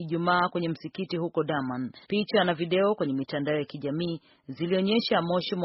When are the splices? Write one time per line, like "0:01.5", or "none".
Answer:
0:02.0